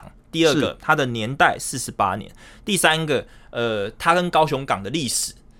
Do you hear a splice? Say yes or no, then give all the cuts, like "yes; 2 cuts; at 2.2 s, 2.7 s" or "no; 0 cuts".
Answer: no; 0 cuts